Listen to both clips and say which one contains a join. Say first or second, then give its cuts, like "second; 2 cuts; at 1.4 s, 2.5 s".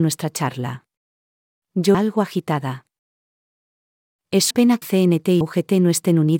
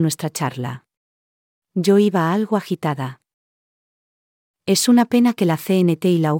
first; 4 cuts; at 1.9 s, 4.5 s, 4.8 s, 5.4 s